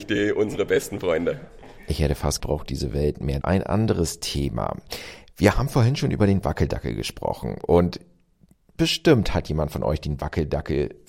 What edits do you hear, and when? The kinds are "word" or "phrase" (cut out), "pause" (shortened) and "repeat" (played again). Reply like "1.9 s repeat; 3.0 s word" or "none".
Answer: 2.4 s phrase; 3.4 s phrase